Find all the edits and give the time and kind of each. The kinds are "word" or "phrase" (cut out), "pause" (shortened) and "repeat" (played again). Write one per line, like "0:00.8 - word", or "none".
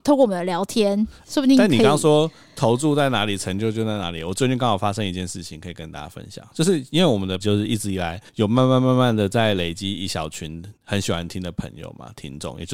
0:07.4 - word
0:08.3 - pause
0:10.8 - pause